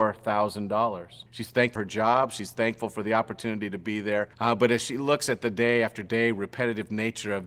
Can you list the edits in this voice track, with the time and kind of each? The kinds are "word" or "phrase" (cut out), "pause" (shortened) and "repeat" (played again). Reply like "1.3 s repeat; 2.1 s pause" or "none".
1.3 s pause; 1.8 s word; 4.3 s pause